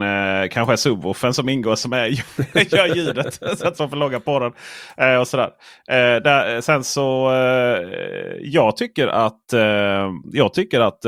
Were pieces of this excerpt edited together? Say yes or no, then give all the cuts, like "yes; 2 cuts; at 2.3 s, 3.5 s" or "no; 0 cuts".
yes; 1 cut; at 3.7 s